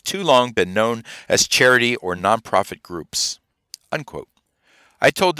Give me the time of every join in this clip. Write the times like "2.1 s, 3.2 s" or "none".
none